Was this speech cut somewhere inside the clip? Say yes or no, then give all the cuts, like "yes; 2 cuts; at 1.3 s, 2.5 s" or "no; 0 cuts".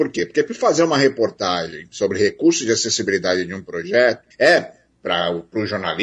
yes; 1 cut; at 4.3 s